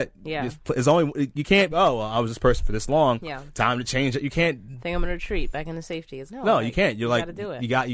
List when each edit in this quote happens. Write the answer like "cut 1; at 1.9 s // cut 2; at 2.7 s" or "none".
cut 1; at 1.7 s // cut 2; at 6.3 s